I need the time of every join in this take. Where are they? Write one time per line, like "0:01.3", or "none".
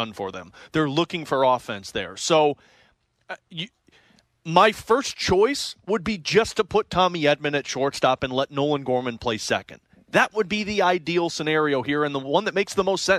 none